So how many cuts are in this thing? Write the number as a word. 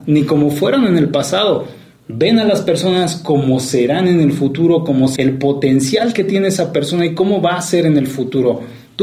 one